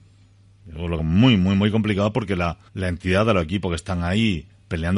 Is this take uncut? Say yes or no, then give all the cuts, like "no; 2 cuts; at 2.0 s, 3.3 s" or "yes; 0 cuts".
no; 2 cuts; at 1.0 s, 2.7 s